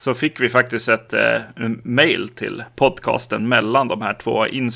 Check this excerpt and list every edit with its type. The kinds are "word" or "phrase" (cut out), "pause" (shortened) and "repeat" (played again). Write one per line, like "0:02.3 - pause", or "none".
none

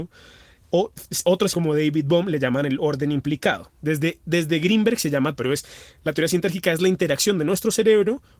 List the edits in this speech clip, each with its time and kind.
0:01.5 - word
0:03.8 - pause
0:05.3 - phrase

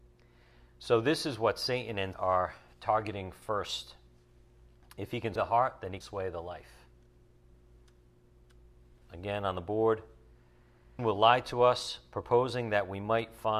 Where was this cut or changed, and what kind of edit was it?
0:02.1 - word
0:05.4 - word
0:06.0 - word
0:09.0 - pause
0:11.0 - word

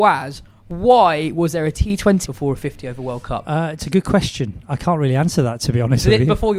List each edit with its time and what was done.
0:02.3 - phrase

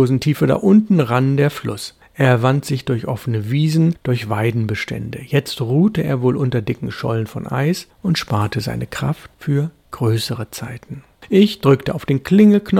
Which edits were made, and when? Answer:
none

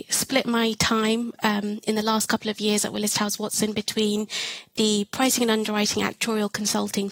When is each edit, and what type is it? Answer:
none

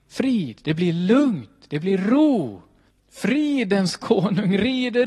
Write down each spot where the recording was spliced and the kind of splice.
0:02.9 - pause

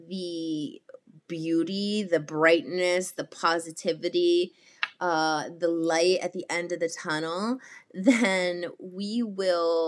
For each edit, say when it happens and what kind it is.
0:01.2 - pause

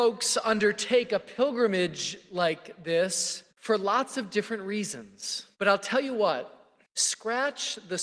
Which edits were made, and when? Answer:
0:03.5 - pause
0:05.5 - pause

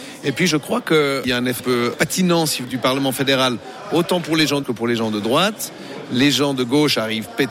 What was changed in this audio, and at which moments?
0:01.6 - word
0:02.6 - word
0:04.6 - word

